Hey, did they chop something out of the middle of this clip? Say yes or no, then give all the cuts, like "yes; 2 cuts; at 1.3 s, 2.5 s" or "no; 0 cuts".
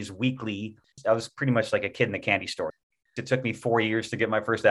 no; 0 cuts